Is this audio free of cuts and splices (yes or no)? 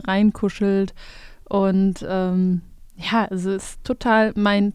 yes